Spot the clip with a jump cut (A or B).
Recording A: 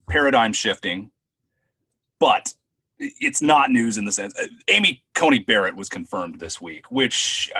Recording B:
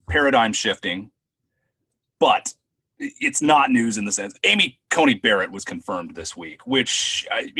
B